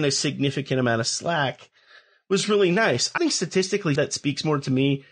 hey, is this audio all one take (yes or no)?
no